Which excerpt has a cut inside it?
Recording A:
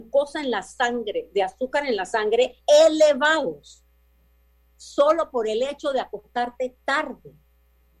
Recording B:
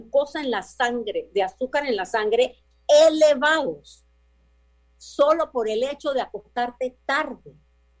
A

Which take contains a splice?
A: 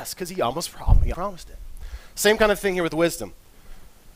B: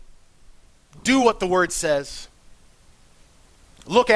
A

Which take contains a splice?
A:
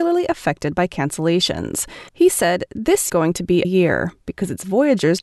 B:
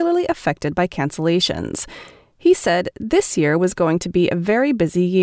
A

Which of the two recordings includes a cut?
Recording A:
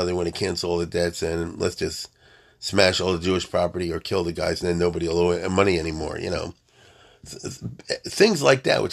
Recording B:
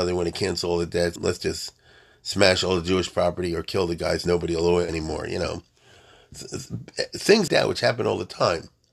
B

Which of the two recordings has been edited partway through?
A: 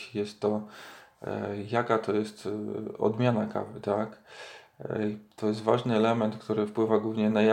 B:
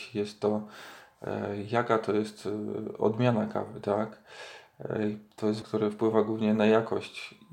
B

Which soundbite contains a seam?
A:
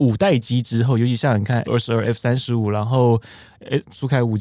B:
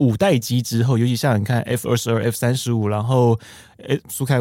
A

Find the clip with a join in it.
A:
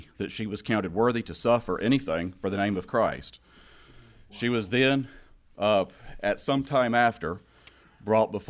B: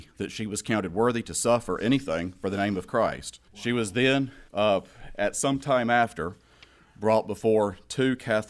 B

